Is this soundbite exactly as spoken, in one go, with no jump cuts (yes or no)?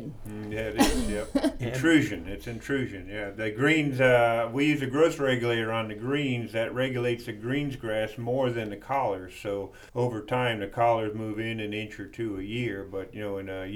no